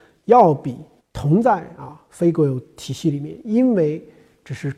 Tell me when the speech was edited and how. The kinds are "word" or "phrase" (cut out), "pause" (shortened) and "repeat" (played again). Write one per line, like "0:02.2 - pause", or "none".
0:01.0 - pause